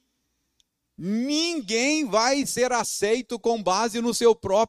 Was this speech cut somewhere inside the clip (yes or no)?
no